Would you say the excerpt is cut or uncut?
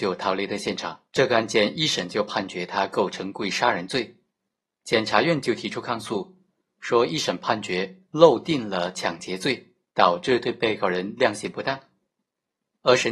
cut